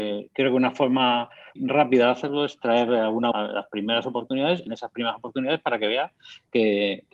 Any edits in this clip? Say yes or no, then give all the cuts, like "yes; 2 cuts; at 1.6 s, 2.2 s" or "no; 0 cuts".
yes; 3 cuts; at 1.6 s, 3.3 s, 4.7 s